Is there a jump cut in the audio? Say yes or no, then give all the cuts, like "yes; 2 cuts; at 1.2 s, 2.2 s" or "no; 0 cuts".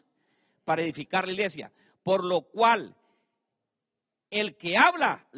no; 0 cuts